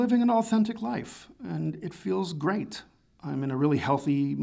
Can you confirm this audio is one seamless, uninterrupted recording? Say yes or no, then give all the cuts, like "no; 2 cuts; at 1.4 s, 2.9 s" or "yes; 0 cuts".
yes; 0 cuts